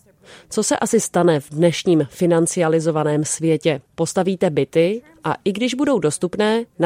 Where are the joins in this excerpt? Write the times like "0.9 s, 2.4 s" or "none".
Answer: 3.9 s